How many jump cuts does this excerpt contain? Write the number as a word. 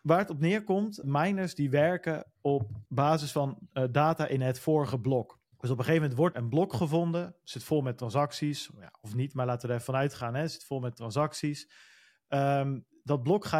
four